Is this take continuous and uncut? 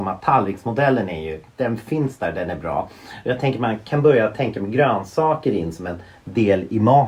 yes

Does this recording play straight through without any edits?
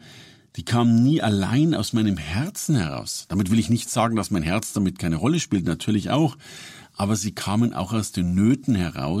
yes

